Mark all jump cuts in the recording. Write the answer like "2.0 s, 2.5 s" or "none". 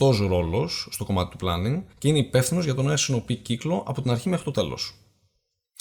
1.9 s